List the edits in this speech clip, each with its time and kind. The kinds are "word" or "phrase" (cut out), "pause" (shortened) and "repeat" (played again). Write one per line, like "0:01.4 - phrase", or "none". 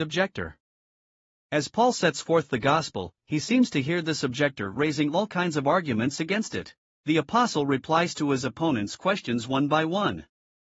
0:06.9 - pause